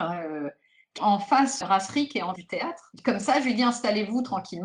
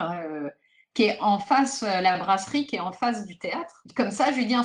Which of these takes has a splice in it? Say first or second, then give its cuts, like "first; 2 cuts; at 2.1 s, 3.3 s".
first; 3 cuts; at 1.0 s, 1.6 s, 2.4 s